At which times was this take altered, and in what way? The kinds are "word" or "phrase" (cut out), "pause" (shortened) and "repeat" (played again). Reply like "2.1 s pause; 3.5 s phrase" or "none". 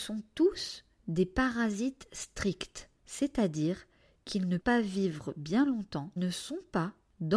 3.0 s pause; 4.6 s word; 6.2 s word